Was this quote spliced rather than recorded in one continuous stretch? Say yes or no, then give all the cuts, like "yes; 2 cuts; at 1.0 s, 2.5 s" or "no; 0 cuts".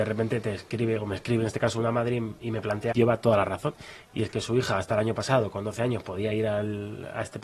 yes; 1 cut; at 2.9 s